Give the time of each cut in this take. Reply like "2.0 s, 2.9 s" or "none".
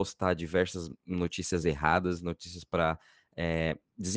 none